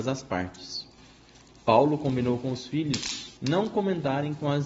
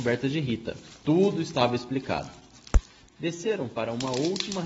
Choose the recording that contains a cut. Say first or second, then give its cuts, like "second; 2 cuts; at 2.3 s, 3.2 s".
first; 1 cut; at 3.4 s